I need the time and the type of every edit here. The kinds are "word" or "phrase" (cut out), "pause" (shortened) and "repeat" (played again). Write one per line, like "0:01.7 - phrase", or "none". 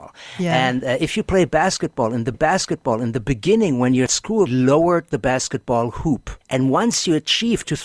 0:02.3 - repeat
0:04.1 - phrase
0:04.5 - word
0:06.4 - pause